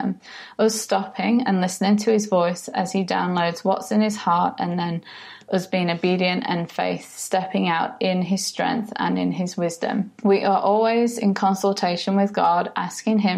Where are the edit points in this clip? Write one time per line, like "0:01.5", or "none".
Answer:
none